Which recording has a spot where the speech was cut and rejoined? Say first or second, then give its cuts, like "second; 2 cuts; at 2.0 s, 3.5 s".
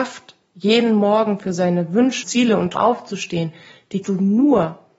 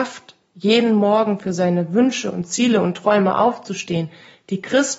first; 3 cuts; at 2.2 s, 2.8 s, 4.0 s